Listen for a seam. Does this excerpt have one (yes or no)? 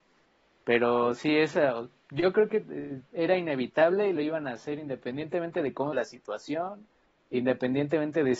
yes